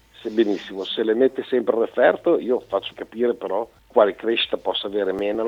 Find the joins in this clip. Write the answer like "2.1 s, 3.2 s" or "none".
2.9 s, 3.8 s